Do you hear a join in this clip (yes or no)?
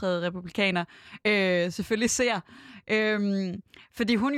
no